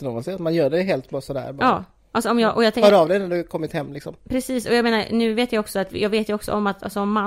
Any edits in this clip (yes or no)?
yes